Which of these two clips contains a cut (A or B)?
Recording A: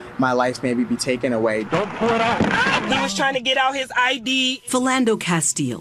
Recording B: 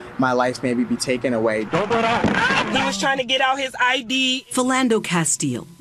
B